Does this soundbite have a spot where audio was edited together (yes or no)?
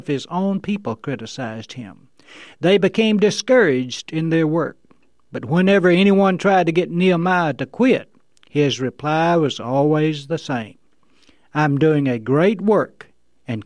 no